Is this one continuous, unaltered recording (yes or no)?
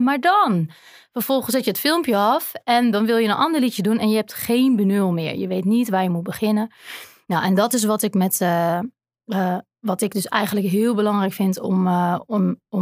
yes